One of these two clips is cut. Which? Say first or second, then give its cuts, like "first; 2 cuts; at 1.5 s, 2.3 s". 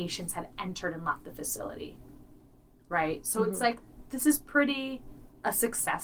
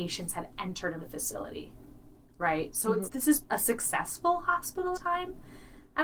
second; 5 cuts; at 1.0 s, 2.2 s, 3.1 s, 3.4 s, 4.9 s